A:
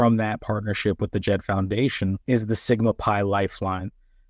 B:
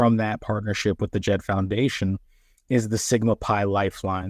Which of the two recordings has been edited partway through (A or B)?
A